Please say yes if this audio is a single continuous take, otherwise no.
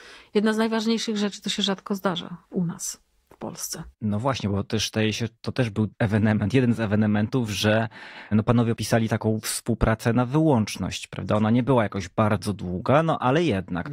no